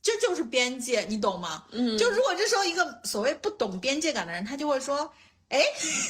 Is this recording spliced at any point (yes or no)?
no